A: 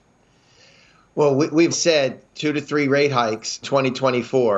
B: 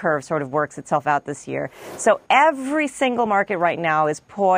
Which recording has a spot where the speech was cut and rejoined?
A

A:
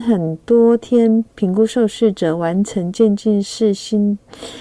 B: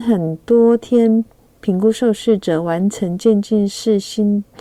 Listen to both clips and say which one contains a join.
A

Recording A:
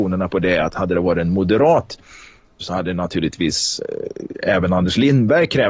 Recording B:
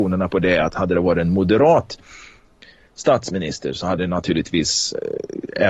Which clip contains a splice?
A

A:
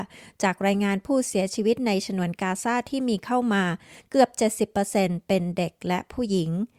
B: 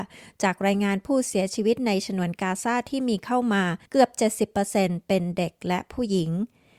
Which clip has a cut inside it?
B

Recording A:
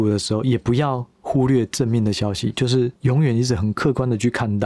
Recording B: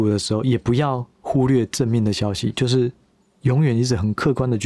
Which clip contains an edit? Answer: A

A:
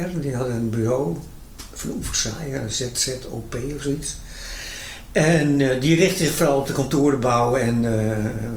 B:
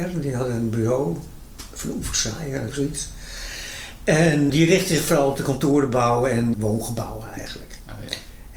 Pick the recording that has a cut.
B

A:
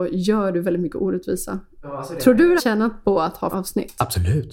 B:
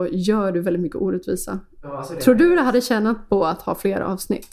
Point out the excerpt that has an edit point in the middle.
A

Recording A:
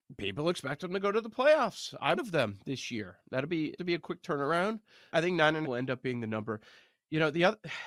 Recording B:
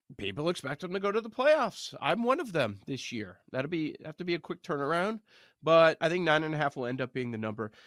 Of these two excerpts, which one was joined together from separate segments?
A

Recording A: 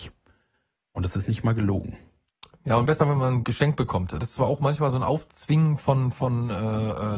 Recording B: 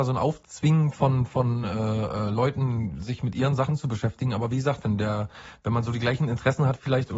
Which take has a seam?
A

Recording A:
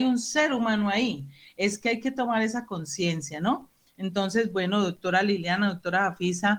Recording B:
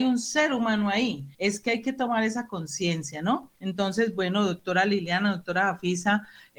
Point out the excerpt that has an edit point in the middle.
B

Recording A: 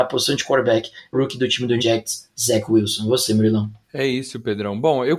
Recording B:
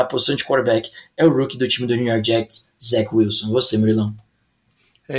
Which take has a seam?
A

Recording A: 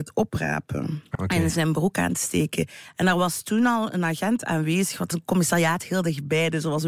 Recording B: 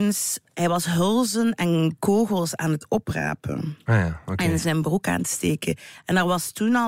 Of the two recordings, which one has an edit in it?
A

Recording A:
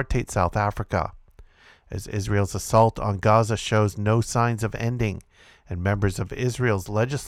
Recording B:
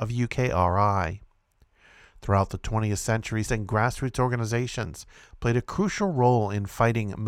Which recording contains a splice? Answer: B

